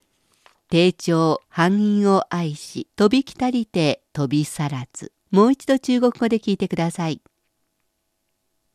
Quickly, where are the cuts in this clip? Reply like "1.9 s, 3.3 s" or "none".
1.4 s, 2.9 s, 4.1 s, 5.2 s